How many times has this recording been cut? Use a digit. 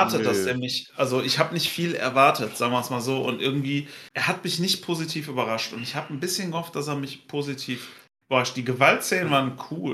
1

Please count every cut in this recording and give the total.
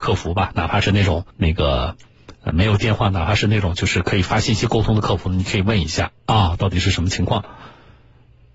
3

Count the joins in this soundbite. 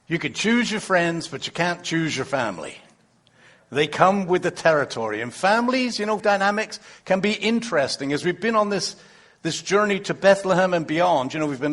1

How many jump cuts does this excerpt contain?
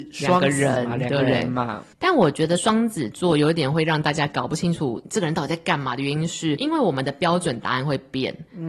1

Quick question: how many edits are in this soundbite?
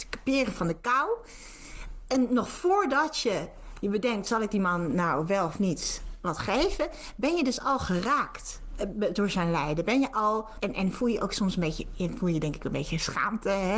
1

